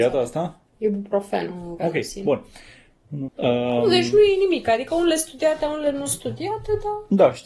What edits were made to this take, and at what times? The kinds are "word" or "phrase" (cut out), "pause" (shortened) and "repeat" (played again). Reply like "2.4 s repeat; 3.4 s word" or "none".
1.8 s word; 3.3 s phrase